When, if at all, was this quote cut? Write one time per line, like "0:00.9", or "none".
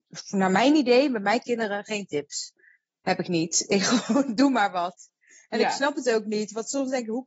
none